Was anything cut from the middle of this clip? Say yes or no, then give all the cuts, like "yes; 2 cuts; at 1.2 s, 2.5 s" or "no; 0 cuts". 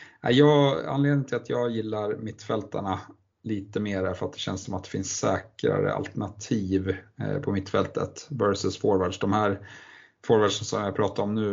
no; 0 cuts